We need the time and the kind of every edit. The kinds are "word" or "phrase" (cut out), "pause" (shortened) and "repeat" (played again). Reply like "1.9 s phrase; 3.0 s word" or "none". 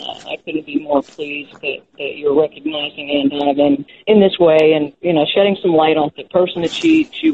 3.9 s pause; 6.1 s phrase

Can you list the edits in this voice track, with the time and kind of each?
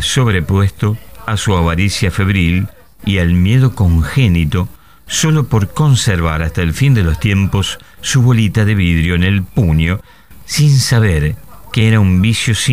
none

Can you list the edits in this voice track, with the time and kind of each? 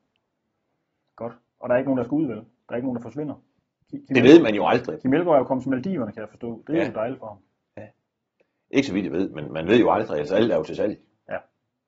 none

